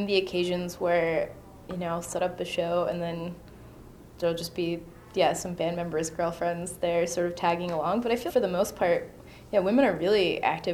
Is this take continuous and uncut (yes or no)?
no